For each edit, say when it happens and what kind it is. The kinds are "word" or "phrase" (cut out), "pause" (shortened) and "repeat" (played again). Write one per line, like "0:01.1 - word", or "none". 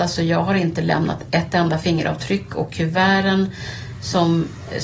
none

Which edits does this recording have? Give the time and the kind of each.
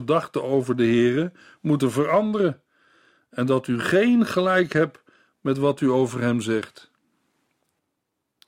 none

